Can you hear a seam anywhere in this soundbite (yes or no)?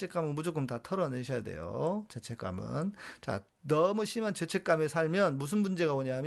no